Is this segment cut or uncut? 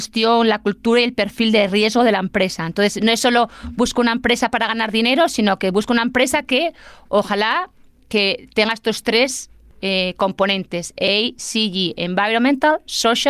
uncut